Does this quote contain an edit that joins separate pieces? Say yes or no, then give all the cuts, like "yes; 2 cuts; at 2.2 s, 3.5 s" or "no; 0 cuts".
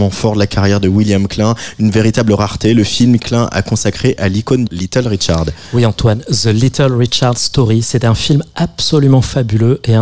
yes; 2 cuts; at 3.2 s, 4.7 s